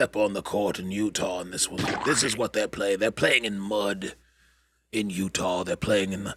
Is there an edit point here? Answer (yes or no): no